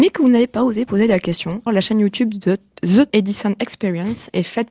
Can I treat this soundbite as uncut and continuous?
no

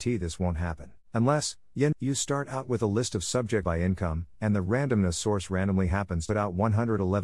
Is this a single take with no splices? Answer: no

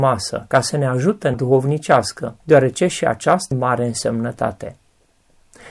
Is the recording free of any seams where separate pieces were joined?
no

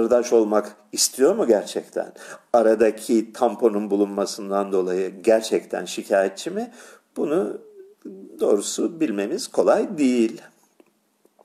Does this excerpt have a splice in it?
no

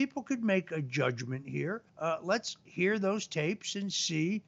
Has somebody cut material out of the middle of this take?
yes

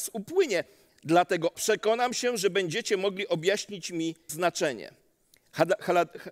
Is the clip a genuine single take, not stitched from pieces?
no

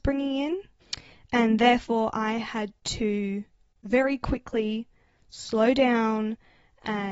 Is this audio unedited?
yes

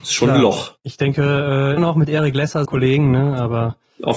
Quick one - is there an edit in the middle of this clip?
yes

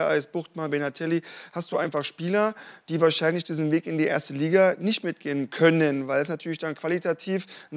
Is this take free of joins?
yes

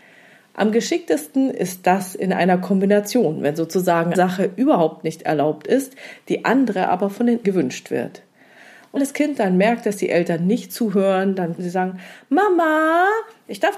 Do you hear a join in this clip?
yes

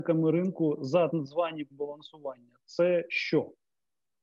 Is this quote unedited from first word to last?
no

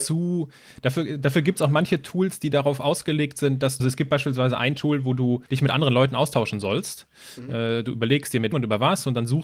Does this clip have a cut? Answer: yes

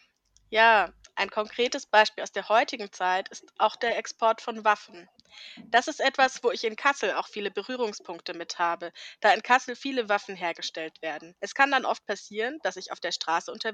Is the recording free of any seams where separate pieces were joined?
no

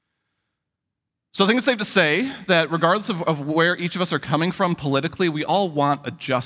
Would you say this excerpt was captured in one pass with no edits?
yes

